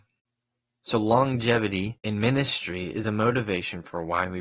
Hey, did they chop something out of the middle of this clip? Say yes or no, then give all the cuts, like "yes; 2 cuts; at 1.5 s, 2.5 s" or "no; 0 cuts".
no; 0 cuts